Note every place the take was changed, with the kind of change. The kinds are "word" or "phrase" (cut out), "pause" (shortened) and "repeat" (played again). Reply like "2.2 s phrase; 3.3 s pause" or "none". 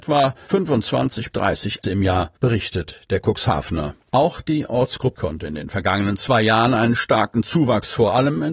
1.3 s word; 1.8 s word; 2.4 s pause; 4.0 s pause; 5.1 s word